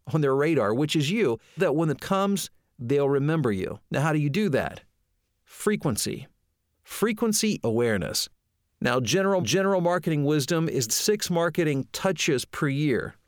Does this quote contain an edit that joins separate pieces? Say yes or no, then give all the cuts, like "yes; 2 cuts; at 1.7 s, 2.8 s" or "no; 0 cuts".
yes; 6 cuts; at 1.6 s, 2.0 s, 3.8 s, 7.6 s, 9.4 s, 10.9 s